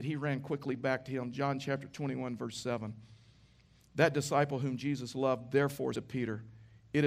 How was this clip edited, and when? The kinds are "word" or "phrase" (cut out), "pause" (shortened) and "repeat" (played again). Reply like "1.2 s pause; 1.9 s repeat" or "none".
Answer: 5.9 s word